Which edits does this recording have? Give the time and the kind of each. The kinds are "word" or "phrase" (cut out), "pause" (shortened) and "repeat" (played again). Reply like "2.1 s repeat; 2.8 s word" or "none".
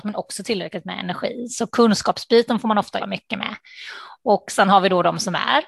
3.0 s word